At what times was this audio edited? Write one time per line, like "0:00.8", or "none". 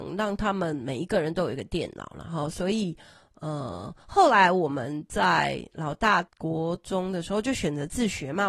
0:06.3